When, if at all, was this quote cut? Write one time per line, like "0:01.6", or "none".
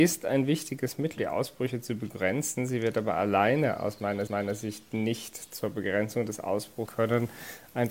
0:01.2
0:04.3
0:06.9